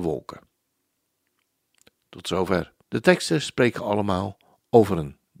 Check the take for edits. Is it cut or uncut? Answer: cut